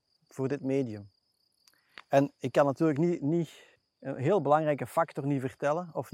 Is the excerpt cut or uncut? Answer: cut